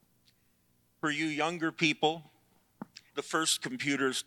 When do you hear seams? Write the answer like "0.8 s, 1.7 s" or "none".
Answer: 3.1 s